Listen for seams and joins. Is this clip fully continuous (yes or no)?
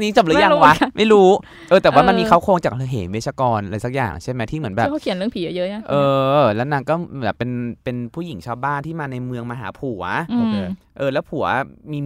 yes